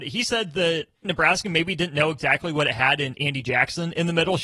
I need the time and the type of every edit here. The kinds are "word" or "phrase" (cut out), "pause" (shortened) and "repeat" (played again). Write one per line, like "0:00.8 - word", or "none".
0:01.0 - word